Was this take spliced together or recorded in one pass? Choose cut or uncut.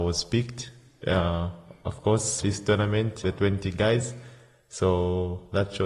cut